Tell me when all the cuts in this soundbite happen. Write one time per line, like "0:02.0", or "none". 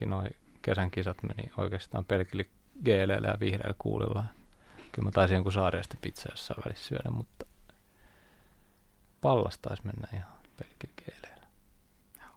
none